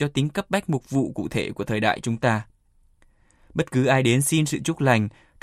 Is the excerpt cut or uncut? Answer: uncut